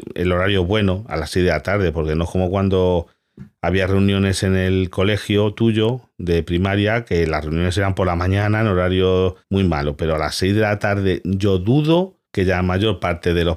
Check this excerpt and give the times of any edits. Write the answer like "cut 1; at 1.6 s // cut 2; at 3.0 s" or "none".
cut 1; at 9.4 s // cut 2; at 12.3 s